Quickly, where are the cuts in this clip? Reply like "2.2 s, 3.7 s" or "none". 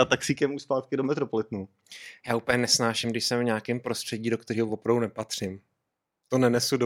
none